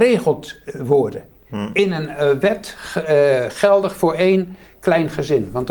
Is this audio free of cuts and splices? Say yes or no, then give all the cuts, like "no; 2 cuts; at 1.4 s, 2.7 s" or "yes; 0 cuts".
yes; 0 cuts